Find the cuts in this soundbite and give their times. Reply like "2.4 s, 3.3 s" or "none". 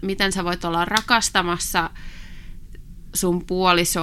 none